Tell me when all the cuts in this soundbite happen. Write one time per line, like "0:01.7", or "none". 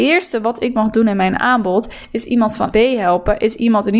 0:02.7